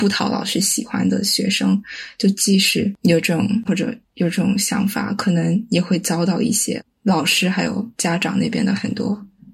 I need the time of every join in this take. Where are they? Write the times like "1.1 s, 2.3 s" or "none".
3.6 s